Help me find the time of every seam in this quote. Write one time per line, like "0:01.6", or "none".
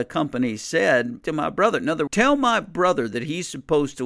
0:01.2
0:02.1